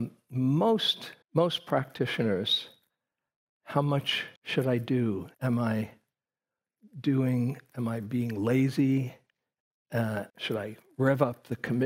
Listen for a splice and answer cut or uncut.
cut